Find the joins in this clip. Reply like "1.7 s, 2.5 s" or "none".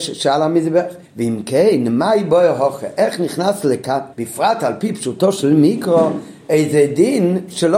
1.0 s, 4.1 s